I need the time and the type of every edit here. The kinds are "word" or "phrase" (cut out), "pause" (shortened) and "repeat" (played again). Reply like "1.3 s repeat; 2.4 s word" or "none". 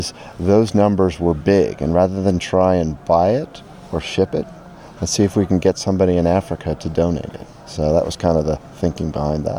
none